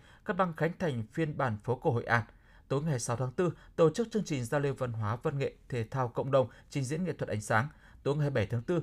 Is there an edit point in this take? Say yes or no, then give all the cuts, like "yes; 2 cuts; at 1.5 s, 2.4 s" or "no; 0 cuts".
no; 0 cuts